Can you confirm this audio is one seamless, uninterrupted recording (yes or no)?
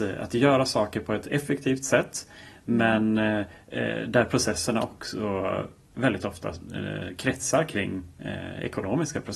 yes